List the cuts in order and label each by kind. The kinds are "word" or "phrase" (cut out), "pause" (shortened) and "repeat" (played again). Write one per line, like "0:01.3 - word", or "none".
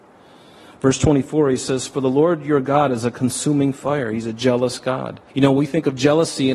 0:05.3 - pause